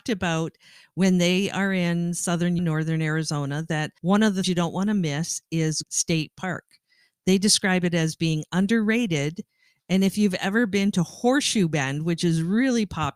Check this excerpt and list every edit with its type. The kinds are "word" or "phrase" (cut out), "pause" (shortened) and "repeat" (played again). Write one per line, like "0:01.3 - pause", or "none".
0:02.6 - word
0:04.0 - pause
0:04.4 - word
0:05.8 - word